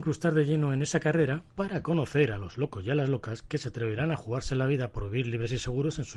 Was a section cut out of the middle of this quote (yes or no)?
yes